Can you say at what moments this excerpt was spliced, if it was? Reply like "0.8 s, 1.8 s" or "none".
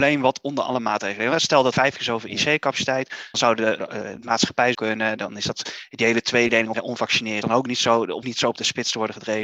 1.7 s, 3.3 s, 3.8 s, 4.7 s, 6.7 s, 7.4 s, 8.2 s